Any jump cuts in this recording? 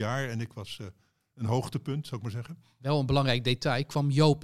no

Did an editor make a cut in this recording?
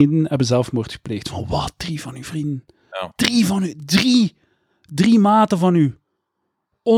no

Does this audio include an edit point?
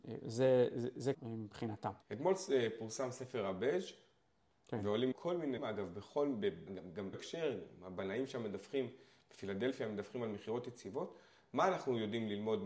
yes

